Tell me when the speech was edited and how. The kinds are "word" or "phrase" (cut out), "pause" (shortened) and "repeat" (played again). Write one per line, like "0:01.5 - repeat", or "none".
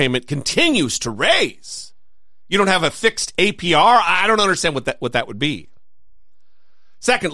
none